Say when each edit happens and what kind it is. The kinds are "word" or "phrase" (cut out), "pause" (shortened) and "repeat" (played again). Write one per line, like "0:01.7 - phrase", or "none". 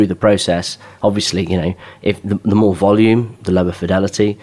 none